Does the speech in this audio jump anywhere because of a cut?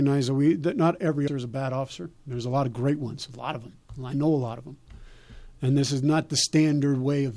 yes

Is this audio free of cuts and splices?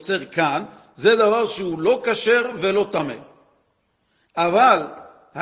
yes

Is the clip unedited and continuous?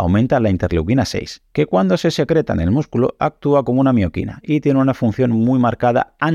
yes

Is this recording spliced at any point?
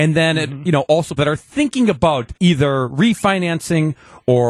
yes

